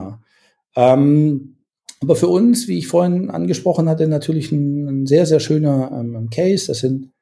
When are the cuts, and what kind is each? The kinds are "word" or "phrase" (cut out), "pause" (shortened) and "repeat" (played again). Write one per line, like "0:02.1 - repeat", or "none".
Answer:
none